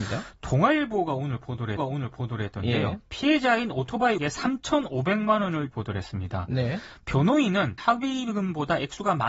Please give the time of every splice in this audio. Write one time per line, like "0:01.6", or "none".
0:01.8
0:04.2
0:05.7
0:07.8